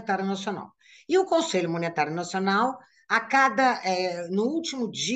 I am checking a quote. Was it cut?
no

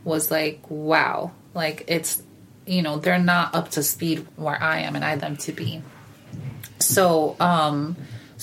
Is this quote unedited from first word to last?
no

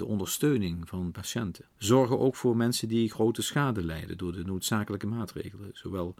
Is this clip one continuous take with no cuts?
no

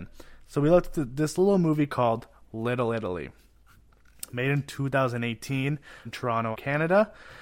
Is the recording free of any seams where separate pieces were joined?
no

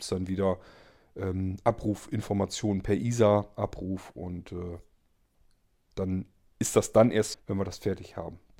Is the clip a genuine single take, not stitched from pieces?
no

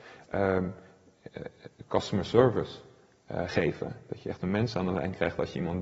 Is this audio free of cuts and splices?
yes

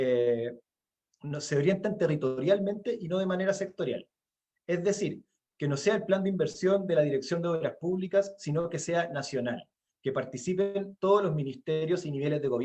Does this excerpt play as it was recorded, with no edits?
yes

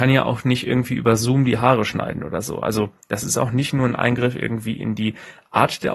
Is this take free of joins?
yes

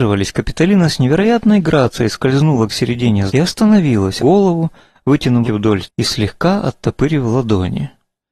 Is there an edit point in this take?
yes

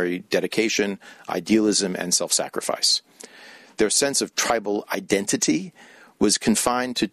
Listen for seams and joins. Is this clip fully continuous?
yes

